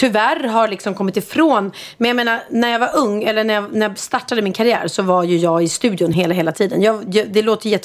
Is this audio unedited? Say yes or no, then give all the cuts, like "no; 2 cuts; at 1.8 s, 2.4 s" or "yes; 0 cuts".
yes; 0 cuts